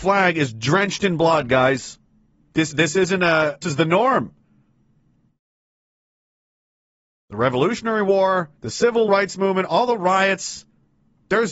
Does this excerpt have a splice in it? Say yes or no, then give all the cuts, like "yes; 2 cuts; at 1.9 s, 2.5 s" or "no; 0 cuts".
yes; 4 cuts; at 2.7 s, 3.6 s, 8.6 s, 9.1 s